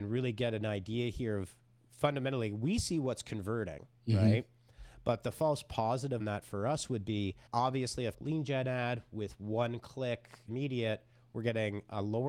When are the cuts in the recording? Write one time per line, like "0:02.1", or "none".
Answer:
0:04.0
0:06.2
0:07.5
0:08.1
0:10.5